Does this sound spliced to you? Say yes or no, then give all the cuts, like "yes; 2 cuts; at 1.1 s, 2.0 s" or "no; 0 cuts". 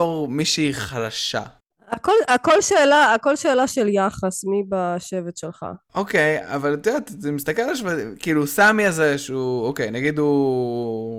no; 0 cuts